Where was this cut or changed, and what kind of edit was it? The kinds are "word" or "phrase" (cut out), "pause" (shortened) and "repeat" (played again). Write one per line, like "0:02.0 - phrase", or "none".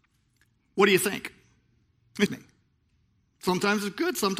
0:02.3 - phrase